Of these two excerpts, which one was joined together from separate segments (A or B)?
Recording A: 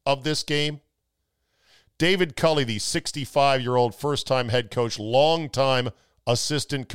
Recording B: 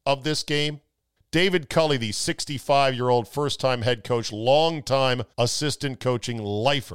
B